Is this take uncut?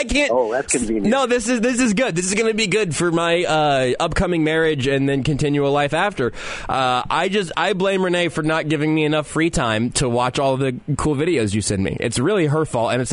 yes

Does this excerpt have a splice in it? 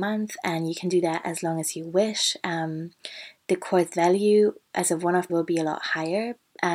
yes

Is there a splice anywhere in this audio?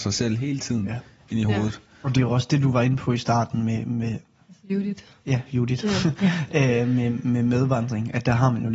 no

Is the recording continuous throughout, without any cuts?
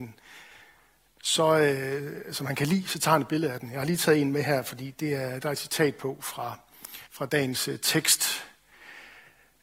no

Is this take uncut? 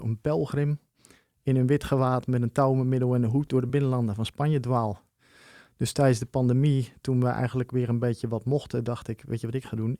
yes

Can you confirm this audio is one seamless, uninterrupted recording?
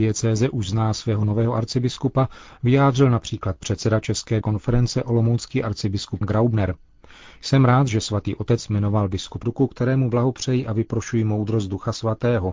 no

